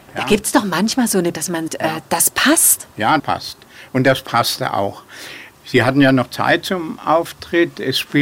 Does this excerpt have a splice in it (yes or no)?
yes